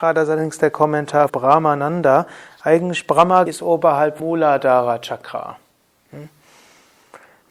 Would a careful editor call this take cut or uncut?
cut